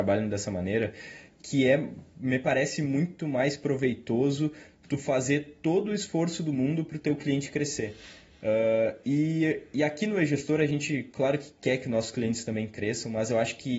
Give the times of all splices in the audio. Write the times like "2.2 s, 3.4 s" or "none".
none

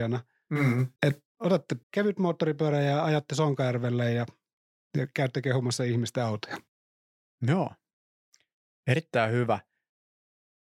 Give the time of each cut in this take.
1.0 s, 1.8 s, 8.3 s

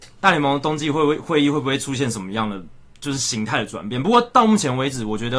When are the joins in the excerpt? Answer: none

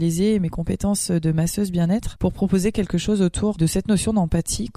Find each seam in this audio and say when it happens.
none

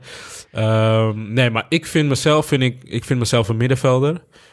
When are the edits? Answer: none

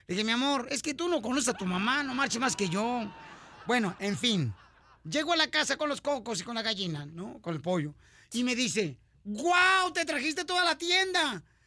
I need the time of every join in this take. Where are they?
none

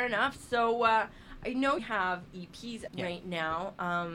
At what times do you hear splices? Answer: 1.8 s, 2.9 s

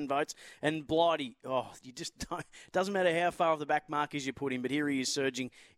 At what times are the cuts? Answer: none

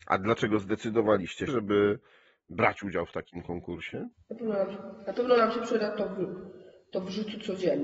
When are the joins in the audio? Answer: 1.5 s, 4.1 s

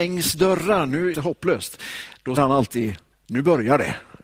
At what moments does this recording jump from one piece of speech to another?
1.1 s, 2.4 s, 3.1 s

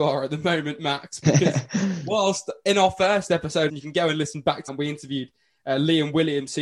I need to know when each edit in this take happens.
3.7 s, 4.7 s

